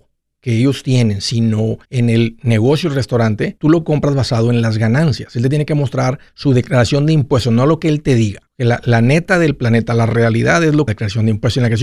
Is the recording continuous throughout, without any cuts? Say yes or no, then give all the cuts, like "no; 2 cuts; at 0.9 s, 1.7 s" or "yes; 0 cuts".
no; 5 cuts; at 1.8 s, 3.6 s, 6.3 s, 8.5 s, 10.9 s